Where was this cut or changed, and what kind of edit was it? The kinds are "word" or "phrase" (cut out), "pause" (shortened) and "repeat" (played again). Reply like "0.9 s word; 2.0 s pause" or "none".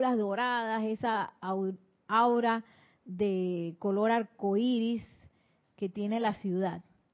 none